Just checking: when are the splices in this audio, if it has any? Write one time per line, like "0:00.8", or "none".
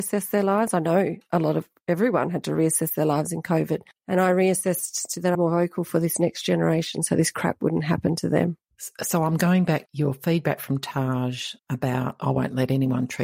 0:05.3
0:11.6